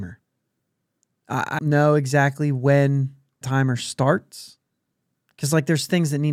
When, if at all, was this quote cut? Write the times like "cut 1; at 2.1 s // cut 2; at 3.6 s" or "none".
cut 1; at 1.6 s // cut 2; at 3.4 s

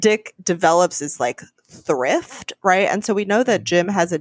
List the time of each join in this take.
none

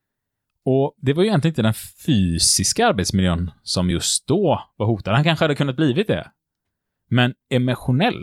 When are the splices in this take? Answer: none

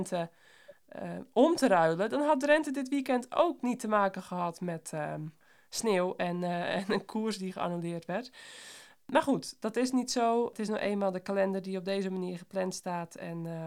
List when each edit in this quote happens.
none

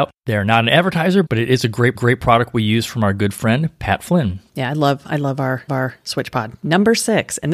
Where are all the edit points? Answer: cut 1; at 1.9 s // cut 2; at 4.5 s // cut 3; at 5.7 s

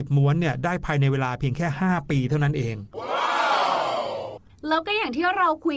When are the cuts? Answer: none

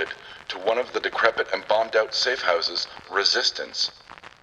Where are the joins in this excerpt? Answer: cut 1; at 3.0 s

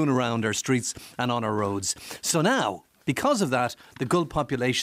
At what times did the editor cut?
none

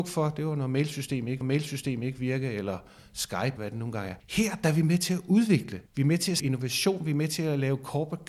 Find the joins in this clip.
cut 1; at 1.4 s // cut 2; at 3.6 s // cut 3; at 4.2 s // cut 4; at 5.9 s // cut 5; at 6.4 s

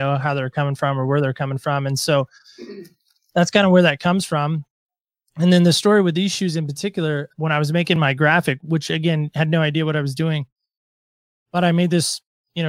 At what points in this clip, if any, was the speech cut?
none

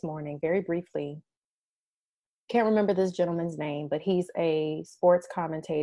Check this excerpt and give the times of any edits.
none

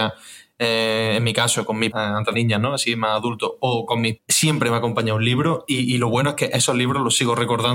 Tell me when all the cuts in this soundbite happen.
cut 1; at 1.9 s // cut 2; at 2.3 s // cut 3; at 4.2 s

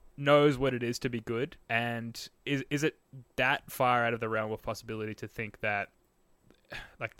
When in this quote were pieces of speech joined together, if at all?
cut 1; at 1.6 s // cut 2; at 3.3 s

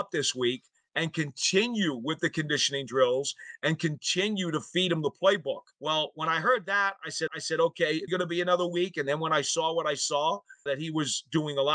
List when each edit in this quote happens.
cut 1; at 5.7 s // cut 2; at 7.3 s // cut 3; at 8.1 s // cut 4; at 10.7 s

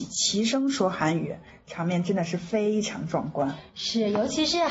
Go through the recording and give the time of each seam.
none

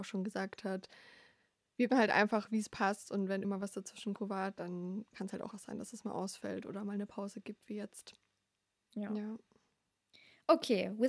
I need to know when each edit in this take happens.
cut 1; at 1.9 s // cut 2; at 3.4 s // cut 3; at 4.2 s // cut 4; at 5.5 s

